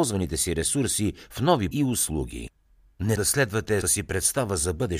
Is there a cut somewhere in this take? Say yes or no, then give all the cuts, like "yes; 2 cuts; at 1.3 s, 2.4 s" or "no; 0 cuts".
yes; 3 cuts; at 1.7 s, 3.2 s, 3.8 s